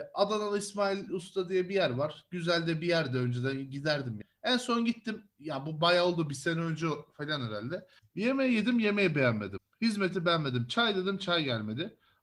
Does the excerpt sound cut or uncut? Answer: uncut